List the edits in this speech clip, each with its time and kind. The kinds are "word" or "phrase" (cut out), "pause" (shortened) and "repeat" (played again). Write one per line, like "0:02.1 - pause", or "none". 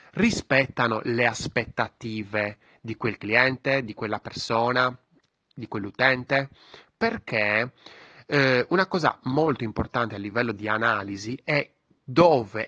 none